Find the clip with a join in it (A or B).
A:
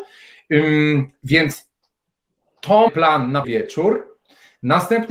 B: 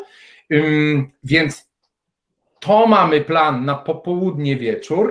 A